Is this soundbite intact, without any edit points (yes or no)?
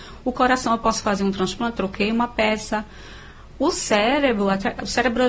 yes